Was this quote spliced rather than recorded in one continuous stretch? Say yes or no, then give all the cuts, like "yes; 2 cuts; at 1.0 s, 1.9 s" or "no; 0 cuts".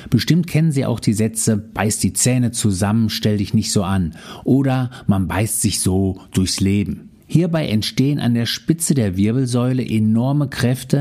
yes; 1 cut; at 7.2 s